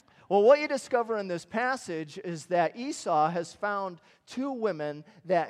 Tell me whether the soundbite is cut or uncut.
uncut